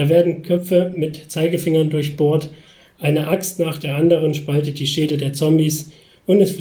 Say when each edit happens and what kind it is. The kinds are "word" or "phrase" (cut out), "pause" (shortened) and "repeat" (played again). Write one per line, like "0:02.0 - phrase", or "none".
none